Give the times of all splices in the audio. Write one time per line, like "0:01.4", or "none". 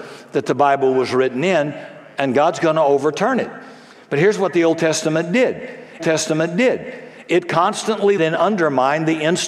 0:06.0
0:08.2

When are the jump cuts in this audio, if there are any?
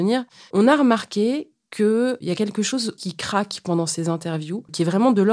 0:03.0

